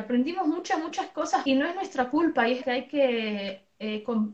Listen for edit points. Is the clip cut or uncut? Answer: cut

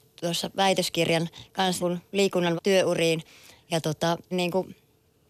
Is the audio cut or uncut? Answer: cut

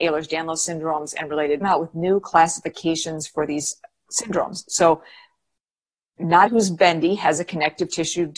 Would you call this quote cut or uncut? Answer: cut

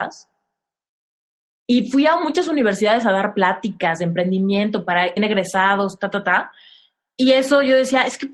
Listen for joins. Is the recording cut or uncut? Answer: cut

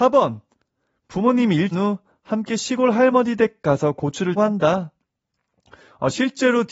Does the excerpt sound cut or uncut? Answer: cut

